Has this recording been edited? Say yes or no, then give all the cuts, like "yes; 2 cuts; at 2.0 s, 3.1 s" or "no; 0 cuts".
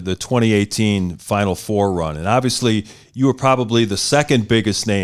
no; 0 cuts